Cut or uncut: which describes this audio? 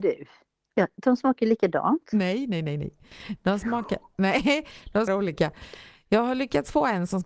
cut